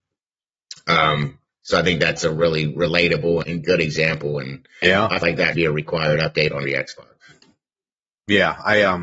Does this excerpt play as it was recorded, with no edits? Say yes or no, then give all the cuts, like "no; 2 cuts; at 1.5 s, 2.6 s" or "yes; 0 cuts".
no; 6 cuts; at 2.2 s, 3.4 s, 4.8 s, 5.2 s, 5.5 s, 6.6 s